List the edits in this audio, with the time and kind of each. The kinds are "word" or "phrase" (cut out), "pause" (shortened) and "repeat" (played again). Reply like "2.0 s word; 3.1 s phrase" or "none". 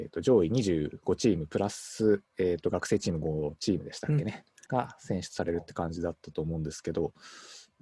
2.3 s pause; 4.7 s phrase